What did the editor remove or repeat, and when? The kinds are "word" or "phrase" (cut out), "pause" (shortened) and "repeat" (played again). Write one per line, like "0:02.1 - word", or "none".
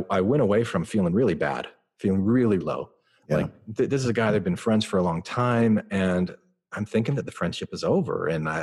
0:02.6 - word